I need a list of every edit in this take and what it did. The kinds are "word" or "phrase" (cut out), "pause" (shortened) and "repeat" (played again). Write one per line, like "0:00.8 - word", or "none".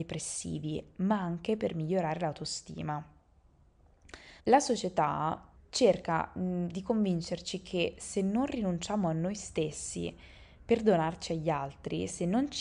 0:04.4 - pause
0:05.6 - pause